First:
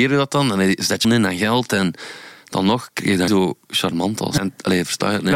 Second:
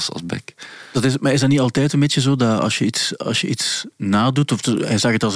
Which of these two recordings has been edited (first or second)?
first